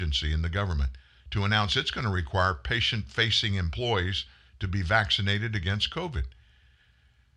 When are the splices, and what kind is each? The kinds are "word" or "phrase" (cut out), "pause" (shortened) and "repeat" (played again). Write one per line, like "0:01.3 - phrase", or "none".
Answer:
none